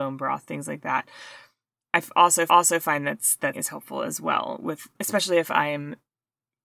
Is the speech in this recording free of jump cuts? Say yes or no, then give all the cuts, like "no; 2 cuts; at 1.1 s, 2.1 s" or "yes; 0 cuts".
no; 2 cuts; at 2.5 s, 3.5 s